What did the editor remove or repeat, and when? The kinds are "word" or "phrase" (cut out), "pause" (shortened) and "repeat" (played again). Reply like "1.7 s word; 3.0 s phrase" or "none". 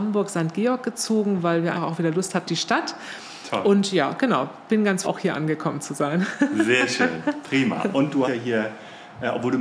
1.7 s word; 2.4 s word; 5.0 s word; 8.2 s word